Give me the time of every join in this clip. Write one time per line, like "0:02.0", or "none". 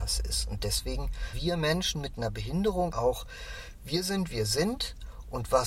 0:01.3
0:02.9
0:04.3